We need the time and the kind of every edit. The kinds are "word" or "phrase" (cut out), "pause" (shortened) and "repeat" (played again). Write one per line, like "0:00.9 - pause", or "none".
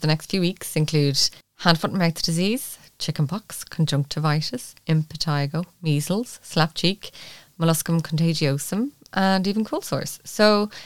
none